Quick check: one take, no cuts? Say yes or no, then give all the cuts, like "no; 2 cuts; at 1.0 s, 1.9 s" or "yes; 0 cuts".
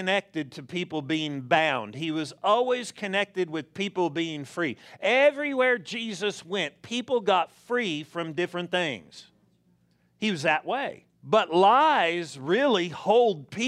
no; 1 cut; at 11.1 s